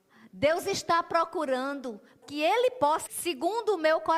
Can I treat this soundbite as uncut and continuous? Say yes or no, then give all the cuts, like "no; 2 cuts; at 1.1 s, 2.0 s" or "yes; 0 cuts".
no; 2 cuts; at 2.2 s, 3.1 s